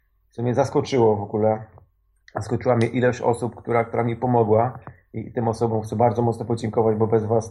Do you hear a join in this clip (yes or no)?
no